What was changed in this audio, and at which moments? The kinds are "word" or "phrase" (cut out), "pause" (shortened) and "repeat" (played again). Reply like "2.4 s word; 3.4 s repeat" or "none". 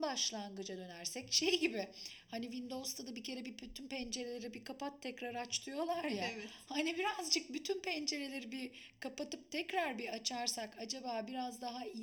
none